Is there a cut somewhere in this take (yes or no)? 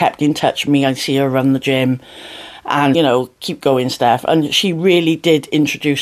yes